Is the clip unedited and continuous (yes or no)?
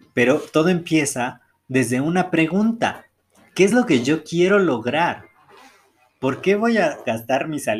yes